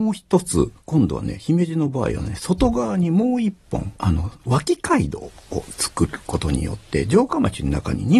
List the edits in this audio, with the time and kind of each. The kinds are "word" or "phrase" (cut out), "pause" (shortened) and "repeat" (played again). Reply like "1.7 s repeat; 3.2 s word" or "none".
4.0 s pause

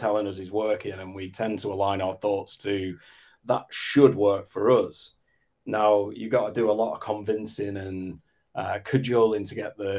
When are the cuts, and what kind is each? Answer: none

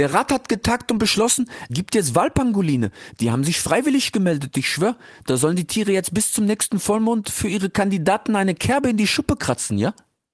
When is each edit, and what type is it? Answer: 1.7 s word

